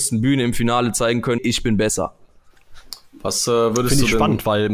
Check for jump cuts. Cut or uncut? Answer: cut